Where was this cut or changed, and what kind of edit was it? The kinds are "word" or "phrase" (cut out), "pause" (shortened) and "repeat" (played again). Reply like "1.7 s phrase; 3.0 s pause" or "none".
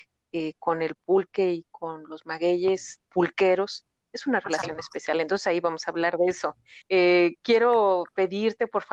3.0 s pause; 6.8 s pause